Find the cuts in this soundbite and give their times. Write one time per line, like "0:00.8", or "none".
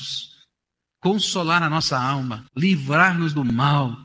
0:02.5